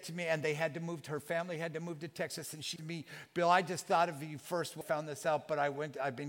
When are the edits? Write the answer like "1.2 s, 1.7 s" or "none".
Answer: 2.8 s, 4.8 s